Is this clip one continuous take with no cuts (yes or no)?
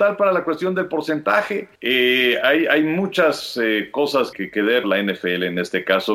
no